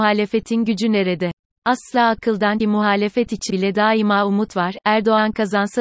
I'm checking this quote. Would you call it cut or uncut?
cut